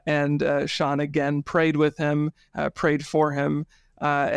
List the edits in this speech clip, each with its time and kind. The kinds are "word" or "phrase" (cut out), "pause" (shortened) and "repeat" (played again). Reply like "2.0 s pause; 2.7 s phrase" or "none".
none